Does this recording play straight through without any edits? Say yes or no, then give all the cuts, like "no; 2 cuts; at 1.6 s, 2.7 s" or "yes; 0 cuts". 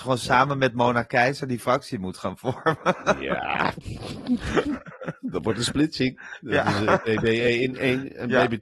yes; 0 cuts